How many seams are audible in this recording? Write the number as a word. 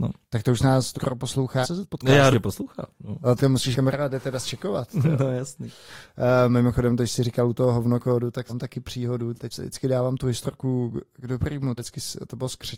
eight